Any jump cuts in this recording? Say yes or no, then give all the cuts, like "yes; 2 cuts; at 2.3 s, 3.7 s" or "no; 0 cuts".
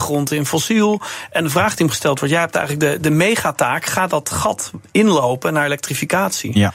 no; 0 cuts